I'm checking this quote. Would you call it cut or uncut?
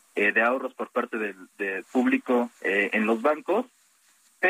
cut